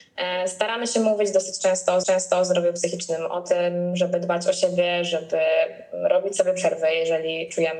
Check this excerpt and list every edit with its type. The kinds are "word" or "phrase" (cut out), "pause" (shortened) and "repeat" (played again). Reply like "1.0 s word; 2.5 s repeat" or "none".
2.0 s repeat

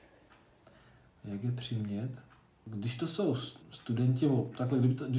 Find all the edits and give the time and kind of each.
3.6 s pause

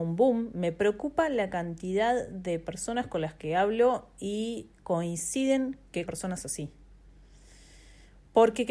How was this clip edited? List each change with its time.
6.1 s word

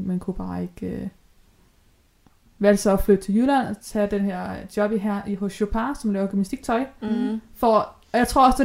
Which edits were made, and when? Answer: none

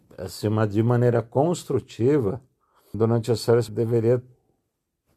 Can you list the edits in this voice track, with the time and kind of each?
2.9 s word; 3.7 s word

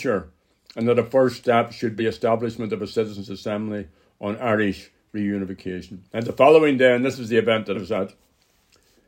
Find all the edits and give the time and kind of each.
2.0 s word; 6.1 s pause; 7.7 s word

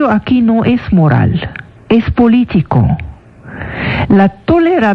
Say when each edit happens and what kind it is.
1.7 s pause

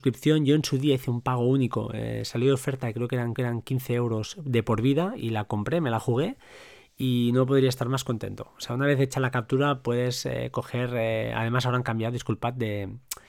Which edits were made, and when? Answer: 3.4 s repeat

